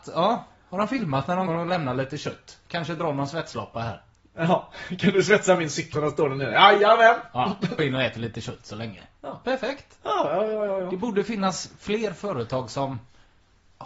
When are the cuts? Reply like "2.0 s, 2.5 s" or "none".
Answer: 1.5 s, 5.9 s, 7.8 s